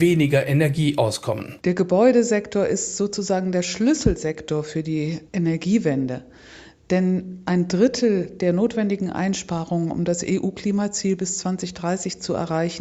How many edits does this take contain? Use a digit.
1